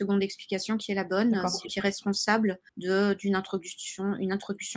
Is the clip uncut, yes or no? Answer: no